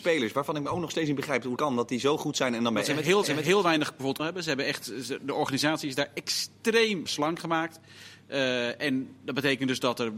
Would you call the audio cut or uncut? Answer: cut